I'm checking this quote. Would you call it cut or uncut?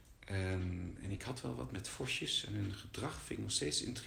uncut